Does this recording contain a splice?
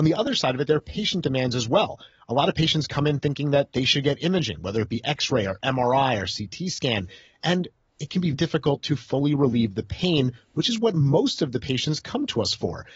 yes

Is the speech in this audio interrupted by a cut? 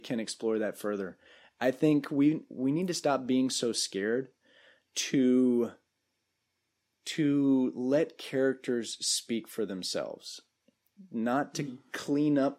no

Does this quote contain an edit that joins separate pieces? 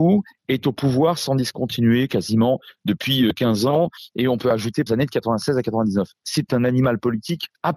yes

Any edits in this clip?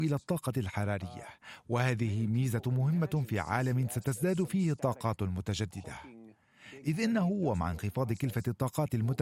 no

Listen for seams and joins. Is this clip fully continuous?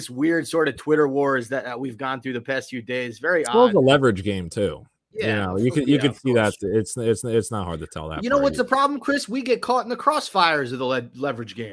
no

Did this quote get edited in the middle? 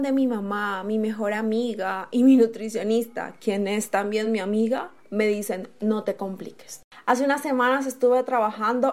no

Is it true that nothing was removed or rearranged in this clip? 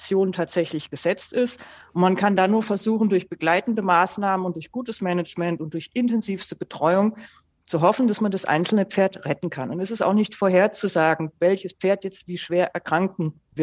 yes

